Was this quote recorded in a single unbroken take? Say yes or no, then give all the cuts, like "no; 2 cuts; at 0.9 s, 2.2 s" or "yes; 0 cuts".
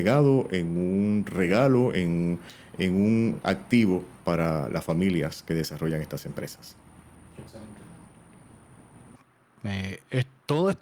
yes; 0 cuts